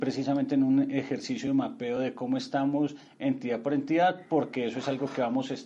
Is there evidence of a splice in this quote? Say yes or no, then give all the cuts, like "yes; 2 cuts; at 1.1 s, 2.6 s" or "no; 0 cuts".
no; 0 cuts